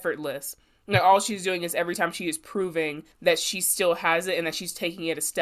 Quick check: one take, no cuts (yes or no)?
no